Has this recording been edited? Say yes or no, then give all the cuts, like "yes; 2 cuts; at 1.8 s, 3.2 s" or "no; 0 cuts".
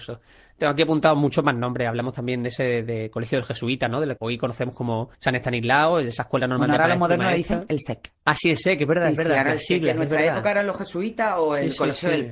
yes; 3 cuts; at 4.2 s, 5.1 s, 8.2 s